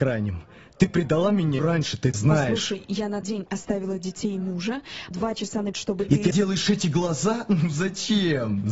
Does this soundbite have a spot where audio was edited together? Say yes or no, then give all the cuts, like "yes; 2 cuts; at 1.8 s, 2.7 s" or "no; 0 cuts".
yes; 6 cuts; at 1.6 s, 2.1 s, 3.2 s, 5.1 s, 5.7 s, 6.3 s